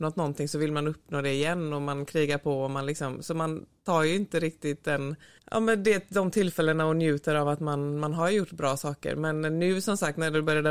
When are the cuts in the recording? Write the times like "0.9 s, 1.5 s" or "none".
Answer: 5.2 s